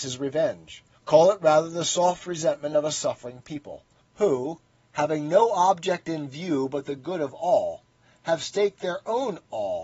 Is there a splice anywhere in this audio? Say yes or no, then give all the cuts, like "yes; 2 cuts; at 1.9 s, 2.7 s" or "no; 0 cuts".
no; 0 cuts